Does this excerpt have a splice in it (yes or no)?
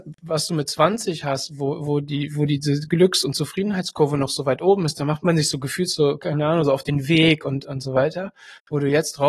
no